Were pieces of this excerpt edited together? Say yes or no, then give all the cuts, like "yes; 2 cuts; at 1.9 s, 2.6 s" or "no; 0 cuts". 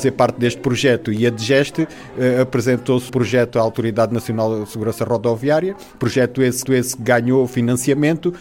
yes; 2 cuts; at 3.1 s, 6.7 s